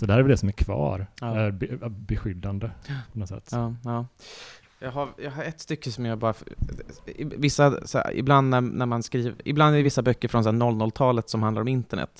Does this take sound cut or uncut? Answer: uncut